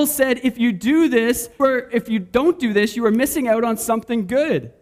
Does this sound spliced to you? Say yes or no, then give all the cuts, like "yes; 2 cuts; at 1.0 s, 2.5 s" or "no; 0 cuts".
yes; 1 cut; at 1.6 s